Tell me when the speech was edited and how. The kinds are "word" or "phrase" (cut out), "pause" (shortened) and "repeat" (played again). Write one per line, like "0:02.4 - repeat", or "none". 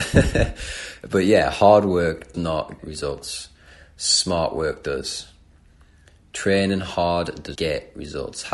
0:02.3 - word
0:02.8 - word
0:07.6 - word

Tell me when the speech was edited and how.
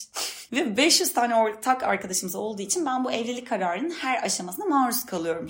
none

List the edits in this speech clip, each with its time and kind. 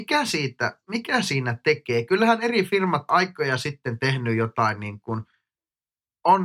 0:03.1 - word

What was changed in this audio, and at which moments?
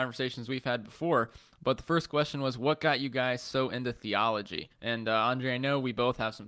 0:04.7 - pause

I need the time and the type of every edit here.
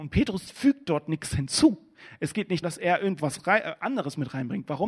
0:02.6 - word
0:03.2 - word

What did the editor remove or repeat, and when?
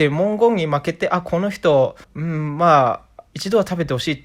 0:02.0 - pause
0:03.3 - pause

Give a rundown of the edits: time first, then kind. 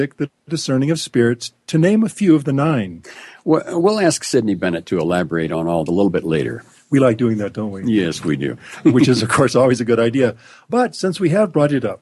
0:05.9 - phrase

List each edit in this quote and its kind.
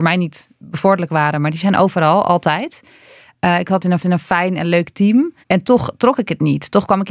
0:04.0 - repeat
0:05.4 - pause

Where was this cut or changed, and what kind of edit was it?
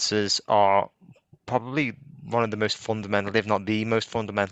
none

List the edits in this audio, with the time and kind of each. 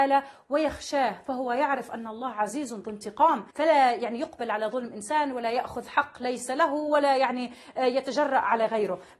0:03.5 - pause

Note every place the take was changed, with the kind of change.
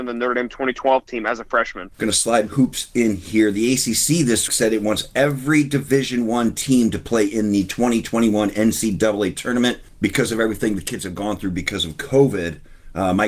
0:01.9 - pause
0:02.5 - word
0:04.5 - word

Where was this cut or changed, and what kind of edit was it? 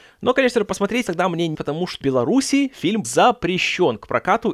0:01.1 - word
0:01.5 - word
0:02.0 - word
0:03.0 - word

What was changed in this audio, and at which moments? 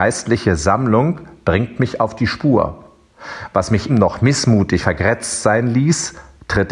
0:03.9 - word
0:04.8 - word

